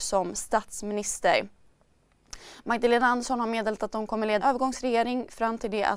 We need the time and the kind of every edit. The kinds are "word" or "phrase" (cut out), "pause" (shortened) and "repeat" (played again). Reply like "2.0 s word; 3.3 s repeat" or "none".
4.4 s word